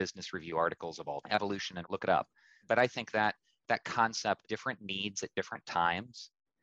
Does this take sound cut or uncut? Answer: cut